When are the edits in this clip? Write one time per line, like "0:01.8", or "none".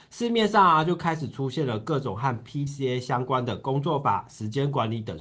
0:02.7